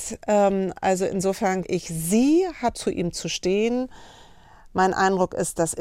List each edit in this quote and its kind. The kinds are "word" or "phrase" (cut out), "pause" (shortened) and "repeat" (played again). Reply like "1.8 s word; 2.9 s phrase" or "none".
1.6 s word; 2.7 s word

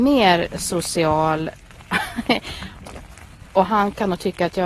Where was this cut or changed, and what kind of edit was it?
none

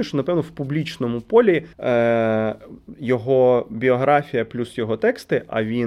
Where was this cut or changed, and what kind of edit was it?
1.7 s pause

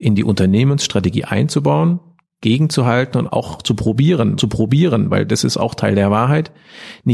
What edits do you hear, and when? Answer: 3.2 s phrase; 4.4 s repeat

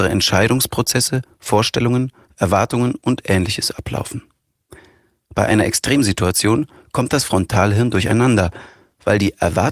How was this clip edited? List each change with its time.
none

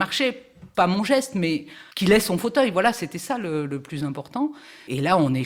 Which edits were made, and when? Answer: 1.9 s pause

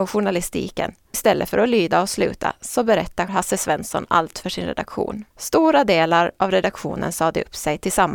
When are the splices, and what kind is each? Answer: 1.1 s word; 3.3 s word; 5.3 s pause

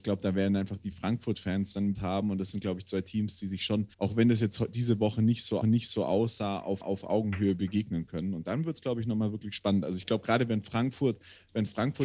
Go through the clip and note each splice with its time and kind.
1.9 s phrase; 3.9 s pause; 5.6 s repeat; 6.8 s repeat

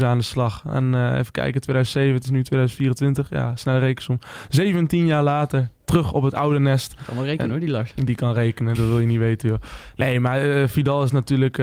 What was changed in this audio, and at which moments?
8.8 s word

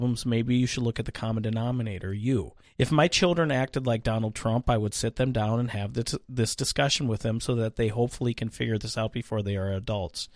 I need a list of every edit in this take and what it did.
2.6 s pause

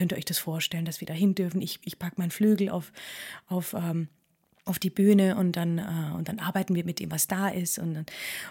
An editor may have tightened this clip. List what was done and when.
none

